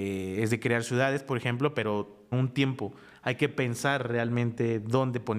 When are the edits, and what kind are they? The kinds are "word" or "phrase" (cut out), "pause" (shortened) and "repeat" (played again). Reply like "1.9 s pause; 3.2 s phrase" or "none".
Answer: 2.3 s word